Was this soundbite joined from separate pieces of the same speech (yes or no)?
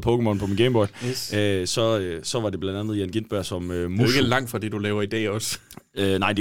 no